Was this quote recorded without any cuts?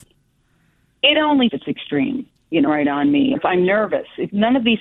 no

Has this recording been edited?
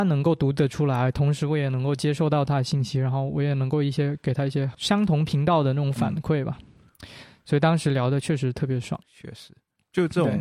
yes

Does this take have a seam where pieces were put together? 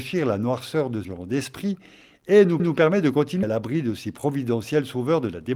yes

